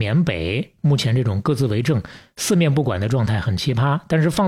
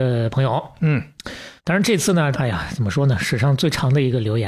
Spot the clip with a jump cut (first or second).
second